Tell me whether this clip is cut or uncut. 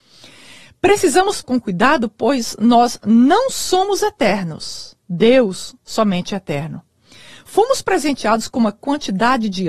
cut